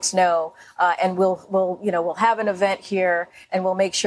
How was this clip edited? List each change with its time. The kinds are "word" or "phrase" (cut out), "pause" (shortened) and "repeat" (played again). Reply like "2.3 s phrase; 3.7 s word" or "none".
none